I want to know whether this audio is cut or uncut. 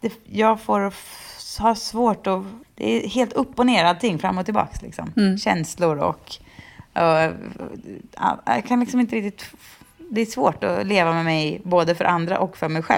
cut